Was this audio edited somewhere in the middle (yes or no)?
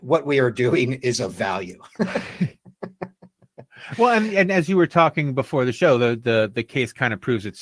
no